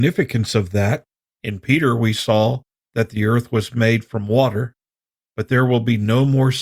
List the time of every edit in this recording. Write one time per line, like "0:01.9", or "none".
none